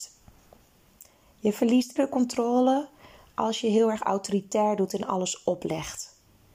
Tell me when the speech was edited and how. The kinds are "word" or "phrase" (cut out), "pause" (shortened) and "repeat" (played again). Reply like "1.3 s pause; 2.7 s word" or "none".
2.0 s word